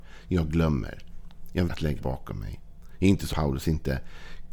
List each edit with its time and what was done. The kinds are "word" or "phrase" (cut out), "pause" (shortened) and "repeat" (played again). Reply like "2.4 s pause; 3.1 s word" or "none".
1.7 s word; 2.0 s word; 3.3 s word